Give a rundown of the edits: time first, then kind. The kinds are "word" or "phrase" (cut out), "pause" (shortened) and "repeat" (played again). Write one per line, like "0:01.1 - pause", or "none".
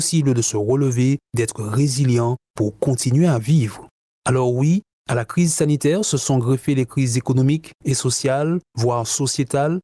0:02.4 - pause